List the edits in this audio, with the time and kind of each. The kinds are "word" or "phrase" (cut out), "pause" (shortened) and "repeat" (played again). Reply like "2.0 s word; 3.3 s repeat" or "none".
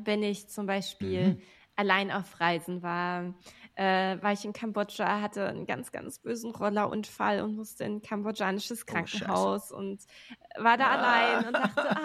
none